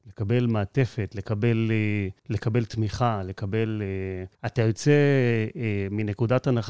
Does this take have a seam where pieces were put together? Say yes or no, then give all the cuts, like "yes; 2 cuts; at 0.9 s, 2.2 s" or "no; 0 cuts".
yes; 2 cuts; at 2.2 s, 4.3 s